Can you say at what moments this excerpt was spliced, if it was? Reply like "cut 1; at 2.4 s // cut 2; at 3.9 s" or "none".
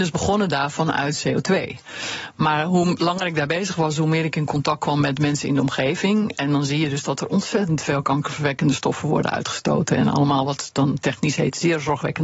none

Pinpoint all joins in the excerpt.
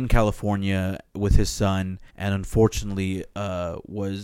cut 1; at 2.1 s

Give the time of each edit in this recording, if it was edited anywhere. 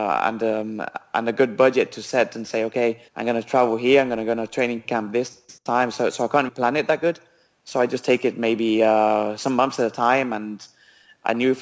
cut 1; at 3.1 s // cut 2; at 5.6 s // cut 3; at 6.5 s

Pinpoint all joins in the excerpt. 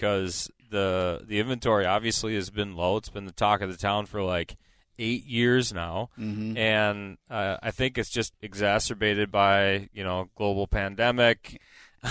cut 1; at 8.3 s

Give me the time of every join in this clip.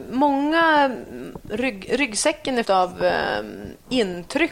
cut 1; at 2.6 s

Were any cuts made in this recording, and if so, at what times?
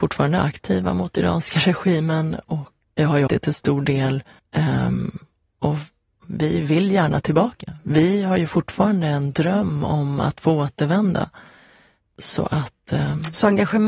cut 1; at 2.8 s // cut 2; at 3.3 s // cut 3; at 4.4 s // cut 4; at 6.2 s

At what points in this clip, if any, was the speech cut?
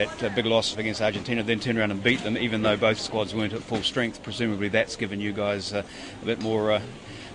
none

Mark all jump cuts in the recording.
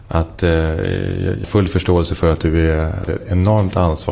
cut 1; at 1.4 s // cut 2; at 3.0 s

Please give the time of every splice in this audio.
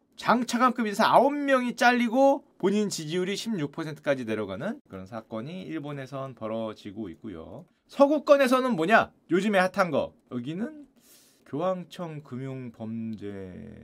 cut 1; at 4.9 s // cut 2; at 10.2 s

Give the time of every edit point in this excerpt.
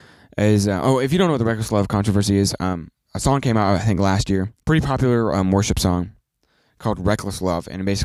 cut 1; at 4.6 s

